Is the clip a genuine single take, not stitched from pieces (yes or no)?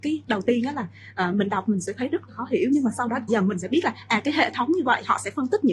no